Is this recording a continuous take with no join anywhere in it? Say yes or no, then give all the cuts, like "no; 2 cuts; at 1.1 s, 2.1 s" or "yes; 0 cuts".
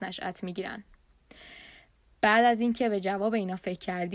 yes; 0 cuts